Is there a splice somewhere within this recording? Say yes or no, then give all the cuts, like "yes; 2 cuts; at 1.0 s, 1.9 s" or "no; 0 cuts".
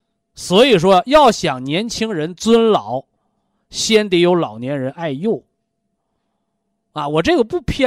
no; 0 cuts